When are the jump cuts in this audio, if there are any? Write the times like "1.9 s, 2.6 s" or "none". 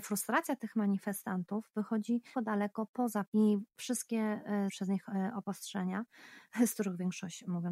2.3 s, 3.2 s, 4.7 s